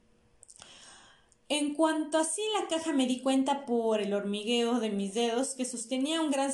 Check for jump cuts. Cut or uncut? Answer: uncut